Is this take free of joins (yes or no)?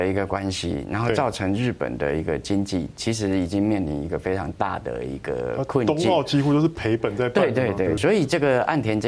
no